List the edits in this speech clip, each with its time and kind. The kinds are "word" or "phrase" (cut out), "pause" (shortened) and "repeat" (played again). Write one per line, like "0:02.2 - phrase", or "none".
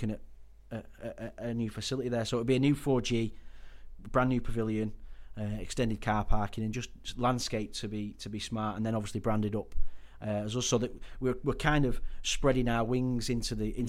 none